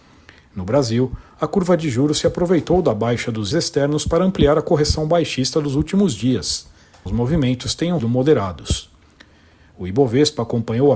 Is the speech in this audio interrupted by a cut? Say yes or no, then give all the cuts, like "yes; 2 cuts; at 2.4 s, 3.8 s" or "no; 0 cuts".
yes; 3 cuts; at 3.5 s, 7.1 s, 8.0 s